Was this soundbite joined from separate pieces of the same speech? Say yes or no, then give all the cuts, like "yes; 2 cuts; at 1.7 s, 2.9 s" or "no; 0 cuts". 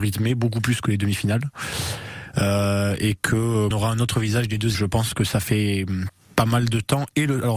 yes; 2 cuts; at 3.7 s, 4.7 s